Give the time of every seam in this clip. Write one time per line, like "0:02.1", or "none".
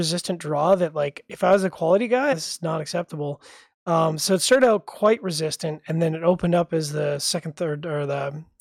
0:02.3

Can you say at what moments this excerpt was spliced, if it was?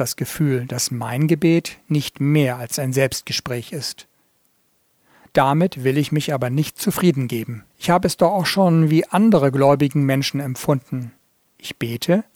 0:07.7

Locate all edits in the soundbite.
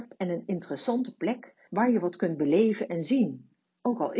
0:01.7

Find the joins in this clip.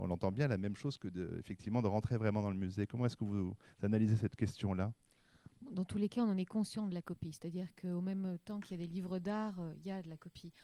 none

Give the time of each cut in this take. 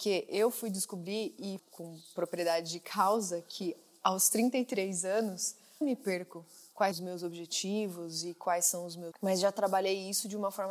0:01.6
0:05.8
0:06.9
0:09.1

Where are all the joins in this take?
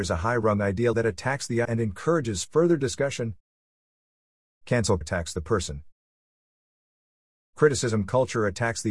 0:00.9
0:01.6
0:05.0

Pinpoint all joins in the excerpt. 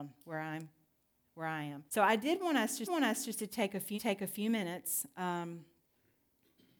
0:01.9
0:02.9
0:04.0

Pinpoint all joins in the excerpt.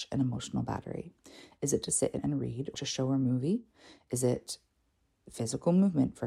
0:02.2
0:02.7

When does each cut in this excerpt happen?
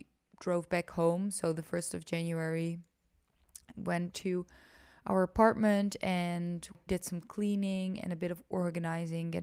0:03.7
0:04.1
0:06.9

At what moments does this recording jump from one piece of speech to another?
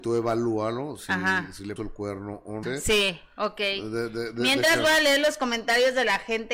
0:01.8
0:02.6

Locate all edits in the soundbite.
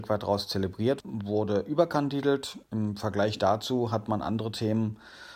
0:01.0
0:02.6

